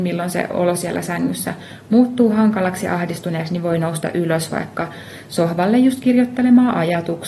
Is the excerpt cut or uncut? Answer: uncut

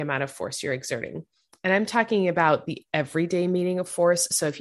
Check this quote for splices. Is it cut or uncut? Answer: uncut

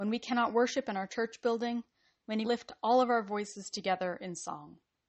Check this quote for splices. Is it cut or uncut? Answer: cut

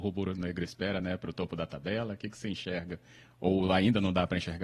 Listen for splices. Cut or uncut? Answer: uncut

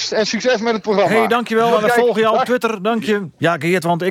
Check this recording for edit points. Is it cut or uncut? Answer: uncut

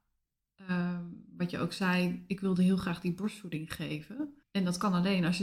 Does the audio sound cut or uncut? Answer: cut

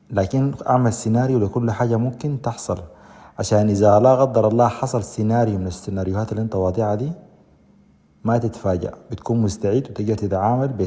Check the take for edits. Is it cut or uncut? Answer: uncut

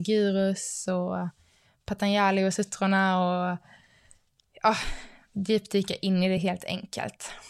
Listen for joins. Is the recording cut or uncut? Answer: uncut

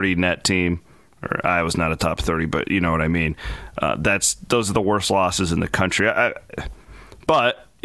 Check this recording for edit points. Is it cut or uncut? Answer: uncut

